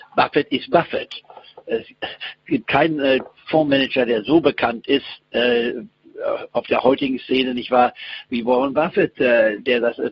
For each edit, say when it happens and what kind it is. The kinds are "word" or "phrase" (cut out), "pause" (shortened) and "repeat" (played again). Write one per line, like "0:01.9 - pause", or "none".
none